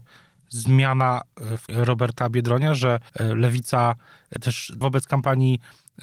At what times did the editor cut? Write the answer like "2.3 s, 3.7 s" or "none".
1.7 s, 3.1 s, 4.4 s, 4.8 s